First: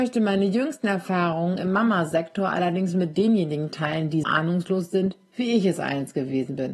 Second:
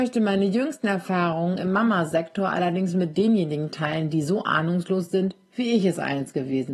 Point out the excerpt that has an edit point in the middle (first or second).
first